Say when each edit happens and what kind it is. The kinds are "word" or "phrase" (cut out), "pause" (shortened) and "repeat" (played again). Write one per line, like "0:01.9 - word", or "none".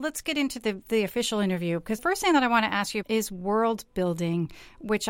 0:02.0 - word
0:03.0 - word